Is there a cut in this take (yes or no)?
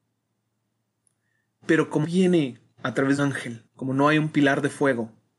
yes